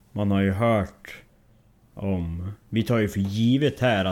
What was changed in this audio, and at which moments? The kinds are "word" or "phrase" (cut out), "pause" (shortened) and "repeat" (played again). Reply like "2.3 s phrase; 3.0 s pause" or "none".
2.6 s pause

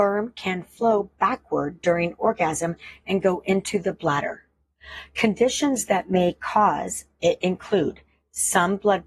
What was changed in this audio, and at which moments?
none

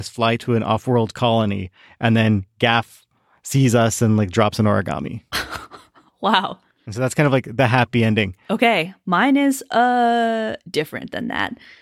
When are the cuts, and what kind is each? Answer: none

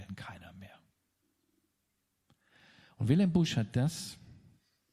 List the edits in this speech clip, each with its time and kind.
none

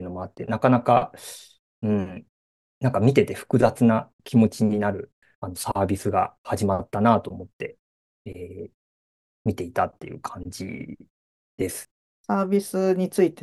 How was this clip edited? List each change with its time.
none

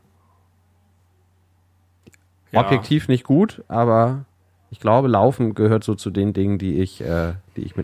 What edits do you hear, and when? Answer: none

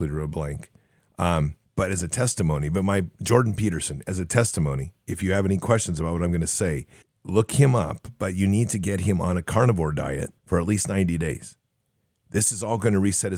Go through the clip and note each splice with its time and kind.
1.6 s pause; 7.0 s pause; 10.4 s pause

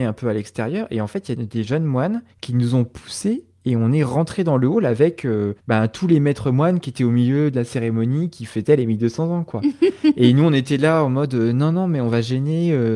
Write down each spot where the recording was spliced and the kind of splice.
2.3 s pause; 5.6 s pause

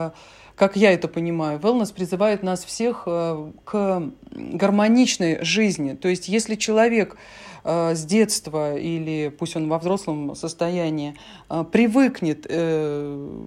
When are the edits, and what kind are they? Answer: none

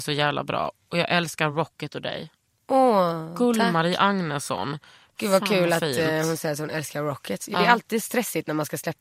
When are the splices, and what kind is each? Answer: none

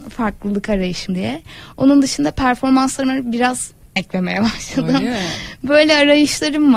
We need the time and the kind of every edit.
1.1 s word; 4.0 s word

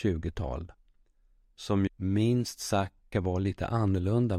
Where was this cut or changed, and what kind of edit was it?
1.9 s word; 3.1 s word

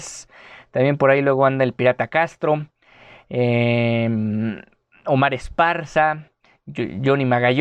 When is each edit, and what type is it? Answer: none

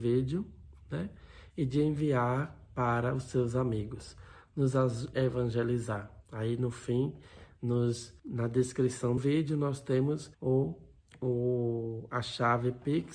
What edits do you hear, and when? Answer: 5.1 s word; 6.2 s pause; 8.2 s pause; 9.2 s word; 10.3 s pause

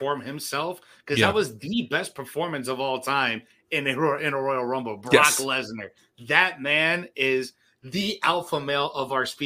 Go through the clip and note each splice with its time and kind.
none

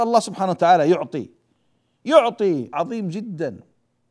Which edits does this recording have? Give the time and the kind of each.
2.7 s word

